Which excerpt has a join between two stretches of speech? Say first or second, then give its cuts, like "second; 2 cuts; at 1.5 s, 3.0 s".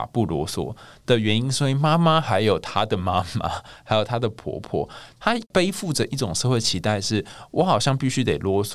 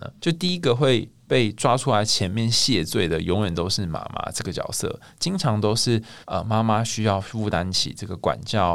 second; 1 cut; at 6.2 s